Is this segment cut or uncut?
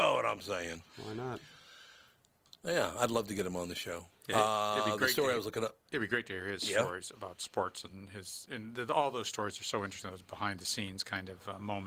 uncut